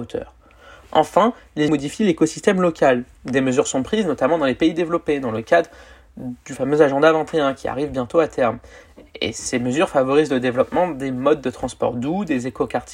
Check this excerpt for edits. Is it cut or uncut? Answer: cut